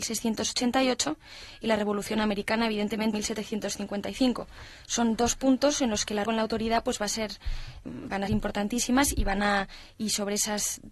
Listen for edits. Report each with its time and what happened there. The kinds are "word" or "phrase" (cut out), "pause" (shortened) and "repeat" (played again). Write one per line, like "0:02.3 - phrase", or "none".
0:03.1 - word
0:06.2 - word
0:07.8 - word
0:08.3 - word